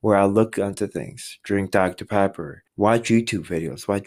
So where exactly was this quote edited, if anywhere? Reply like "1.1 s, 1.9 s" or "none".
2.7 s